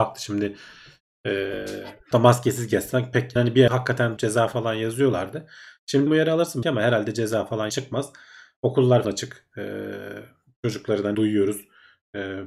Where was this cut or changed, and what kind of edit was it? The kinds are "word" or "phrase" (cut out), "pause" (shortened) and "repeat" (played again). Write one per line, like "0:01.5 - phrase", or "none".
0:02.1 - word
0:03.4 - word
0:03.7 - word
0:04.2 - word
0:06.1 - word
0:06.6 - word
0:07.7 - word
0:09.0 - word
0:11.1 - word